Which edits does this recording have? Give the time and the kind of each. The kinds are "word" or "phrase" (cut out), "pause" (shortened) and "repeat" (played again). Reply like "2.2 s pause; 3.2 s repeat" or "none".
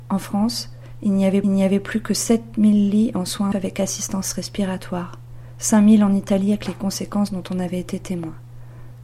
1.4 s repeat; 3.5 s word